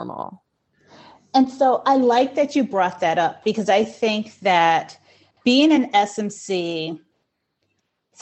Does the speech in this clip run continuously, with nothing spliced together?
yes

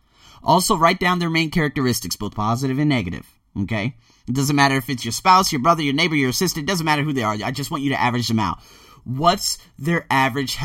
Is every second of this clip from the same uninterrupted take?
yes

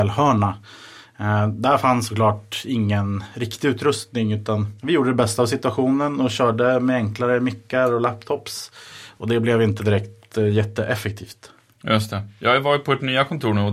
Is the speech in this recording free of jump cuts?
no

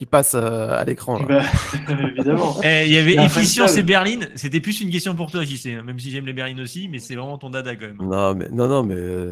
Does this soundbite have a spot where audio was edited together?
no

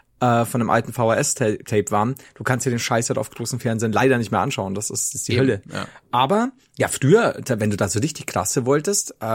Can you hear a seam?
no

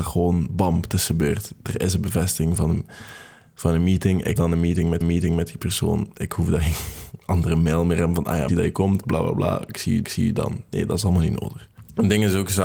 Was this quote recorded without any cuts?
no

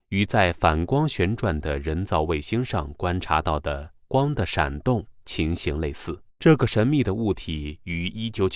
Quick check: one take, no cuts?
no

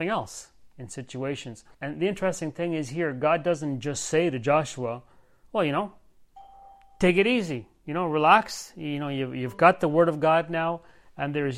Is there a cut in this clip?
yes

